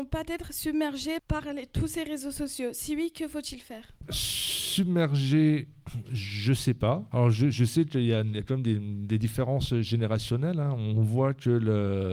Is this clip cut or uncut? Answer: uncut